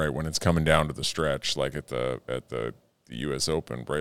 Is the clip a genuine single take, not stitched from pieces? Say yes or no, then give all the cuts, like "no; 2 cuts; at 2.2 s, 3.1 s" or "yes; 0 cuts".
yes; 0 cuts